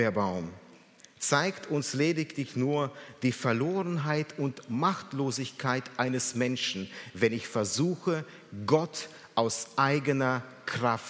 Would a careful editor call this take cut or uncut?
uncut